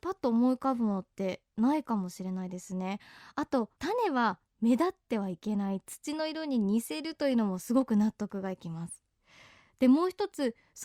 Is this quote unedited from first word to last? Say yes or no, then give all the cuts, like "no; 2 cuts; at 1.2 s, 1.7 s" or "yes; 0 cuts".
no; 1 cut; at 3.7 s